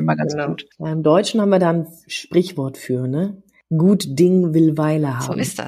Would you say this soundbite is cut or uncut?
uncut